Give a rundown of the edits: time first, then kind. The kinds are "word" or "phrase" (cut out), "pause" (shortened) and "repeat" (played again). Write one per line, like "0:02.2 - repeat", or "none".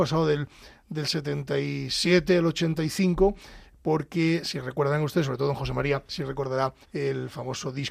0:06.1 - pause
0:06.8 - pause